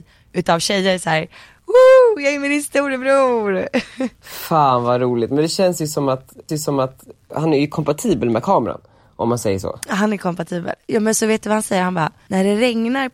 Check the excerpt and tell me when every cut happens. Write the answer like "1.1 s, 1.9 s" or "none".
4.1 s, 6.5 s